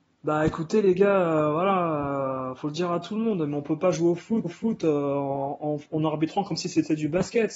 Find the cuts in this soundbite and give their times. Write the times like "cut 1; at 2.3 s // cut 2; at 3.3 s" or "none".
cut 1; at 4.4 s